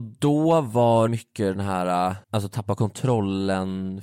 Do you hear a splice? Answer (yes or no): yes